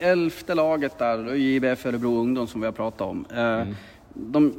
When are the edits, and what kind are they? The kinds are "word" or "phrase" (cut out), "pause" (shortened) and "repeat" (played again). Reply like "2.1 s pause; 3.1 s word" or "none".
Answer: none